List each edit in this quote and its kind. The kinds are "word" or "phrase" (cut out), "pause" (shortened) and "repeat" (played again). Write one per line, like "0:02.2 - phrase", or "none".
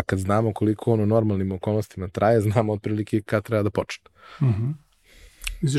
none

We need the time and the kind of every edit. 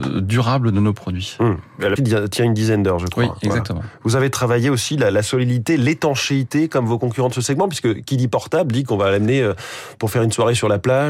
0:02.0 - word

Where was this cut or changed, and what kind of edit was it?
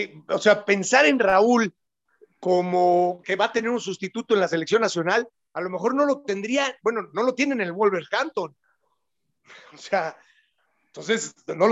0:03.2 - word

